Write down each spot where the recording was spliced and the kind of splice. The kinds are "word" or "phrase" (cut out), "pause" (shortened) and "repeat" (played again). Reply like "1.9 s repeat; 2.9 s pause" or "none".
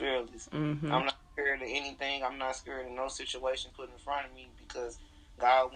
3.7 s word